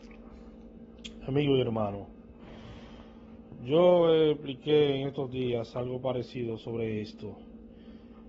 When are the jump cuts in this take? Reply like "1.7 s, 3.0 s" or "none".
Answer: none